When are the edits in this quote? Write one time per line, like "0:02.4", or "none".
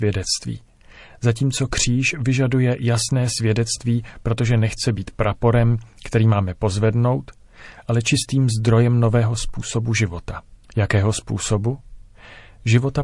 0:10.6